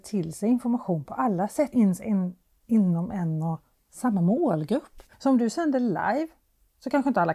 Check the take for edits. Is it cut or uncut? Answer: cut